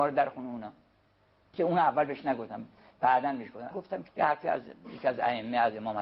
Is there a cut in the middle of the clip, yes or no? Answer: yes